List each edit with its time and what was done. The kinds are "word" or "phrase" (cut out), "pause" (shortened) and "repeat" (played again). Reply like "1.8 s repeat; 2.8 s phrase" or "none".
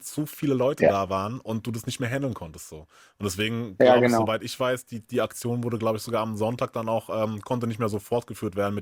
none